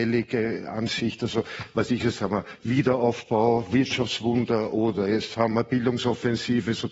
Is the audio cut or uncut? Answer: uncut